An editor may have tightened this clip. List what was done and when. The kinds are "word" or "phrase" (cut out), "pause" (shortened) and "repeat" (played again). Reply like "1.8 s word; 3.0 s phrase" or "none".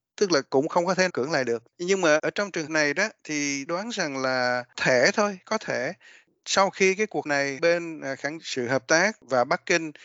1.1 s word; 1.7 s pause; 2.2 s word; 2.7 s word; 3.7 s word; 4.7 s word; 7.2 s word; 7.6 s word; 8.4 s phrase